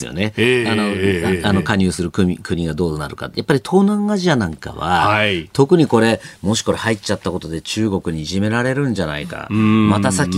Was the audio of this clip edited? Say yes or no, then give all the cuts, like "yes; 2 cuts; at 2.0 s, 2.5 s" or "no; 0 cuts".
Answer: no; 0 cuts